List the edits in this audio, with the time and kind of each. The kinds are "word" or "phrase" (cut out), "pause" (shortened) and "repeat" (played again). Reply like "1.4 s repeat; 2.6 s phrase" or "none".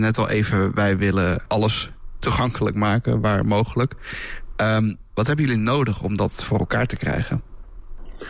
1.5 s word